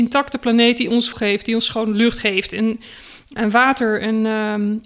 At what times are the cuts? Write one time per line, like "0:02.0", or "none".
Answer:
0:01.1
0:03.4